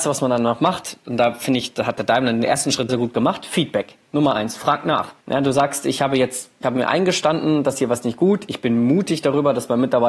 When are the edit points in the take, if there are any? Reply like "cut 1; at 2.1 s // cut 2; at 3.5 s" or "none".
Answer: cut 1; at 2.9 s // cut 2; at 5.2 s // cut 3; at 6.6 s